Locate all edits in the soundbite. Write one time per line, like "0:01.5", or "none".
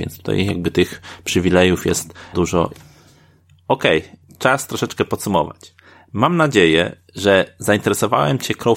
0:02.3